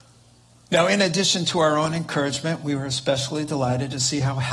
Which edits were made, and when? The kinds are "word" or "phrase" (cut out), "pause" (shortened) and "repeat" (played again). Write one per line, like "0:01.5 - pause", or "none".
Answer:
none